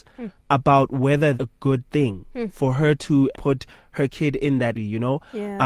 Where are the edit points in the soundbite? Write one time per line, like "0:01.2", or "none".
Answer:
0:01.4
0:03.3
0:04.7

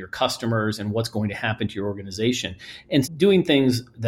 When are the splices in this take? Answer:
0:03.0

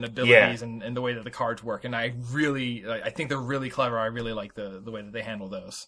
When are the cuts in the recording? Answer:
none

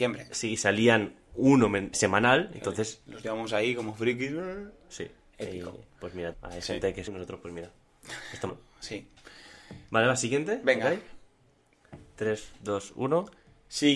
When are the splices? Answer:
0:01.9
0:03.2
0:05.9
0:06.3
0:07.1
0:08.5

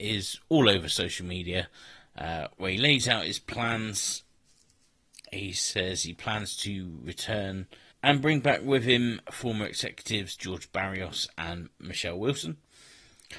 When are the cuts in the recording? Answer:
0:07.9

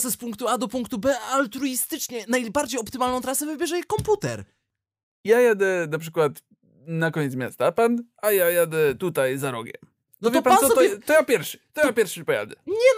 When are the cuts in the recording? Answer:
none

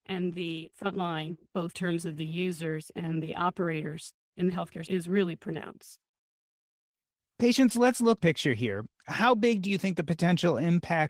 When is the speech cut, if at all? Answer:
0:01.7
0:04.9
0:08.2

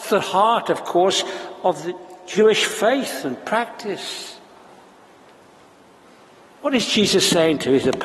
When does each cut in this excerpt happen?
none

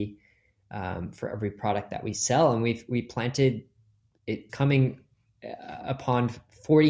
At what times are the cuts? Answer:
0:04.5

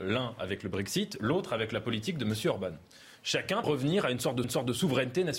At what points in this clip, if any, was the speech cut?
0:03.6
0:04.4

